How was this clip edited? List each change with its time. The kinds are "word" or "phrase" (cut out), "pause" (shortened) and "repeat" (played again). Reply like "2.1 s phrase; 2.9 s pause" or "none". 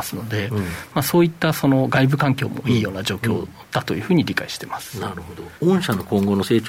5.6 s pause